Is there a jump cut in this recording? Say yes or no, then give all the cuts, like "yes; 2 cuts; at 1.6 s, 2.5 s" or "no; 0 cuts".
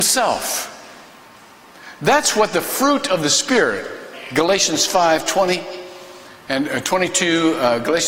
no; 0 cuts